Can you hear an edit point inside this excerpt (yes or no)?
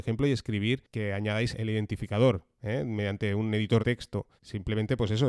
yes